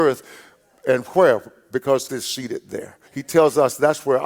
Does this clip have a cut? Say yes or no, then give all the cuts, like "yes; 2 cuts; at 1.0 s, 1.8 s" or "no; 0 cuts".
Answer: yes; 2 cuts; at 2.1 s, 3.1 s